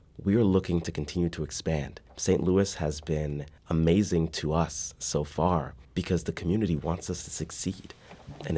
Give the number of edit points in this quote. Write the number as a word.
three